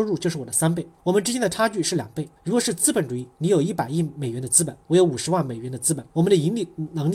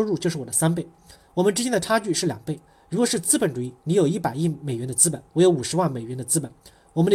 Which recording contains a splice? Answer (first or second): first